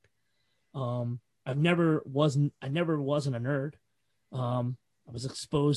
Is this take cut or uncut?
uncut